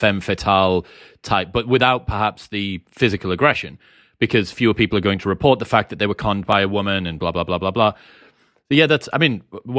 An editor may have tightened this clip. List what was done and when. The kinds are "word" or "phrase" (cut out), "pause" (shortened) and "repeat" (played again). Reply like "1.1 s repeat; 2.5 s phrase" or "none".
none